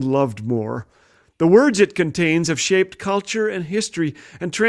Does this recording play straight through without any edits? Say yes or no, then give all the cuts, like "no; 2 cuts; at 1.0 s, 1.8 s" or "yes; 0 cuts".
yes; 0 cuts